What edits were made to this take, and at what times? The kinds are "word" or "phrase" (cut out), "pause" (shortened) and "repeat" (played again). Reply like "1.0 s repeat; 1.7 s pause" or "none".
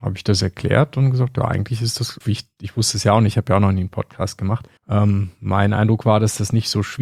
2.2 s word; 4.8 s pause